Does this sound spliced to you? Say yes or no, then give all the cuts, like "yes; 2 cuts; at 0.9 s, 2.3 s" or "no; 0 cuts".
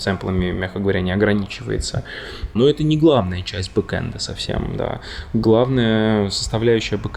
no; 0 cuts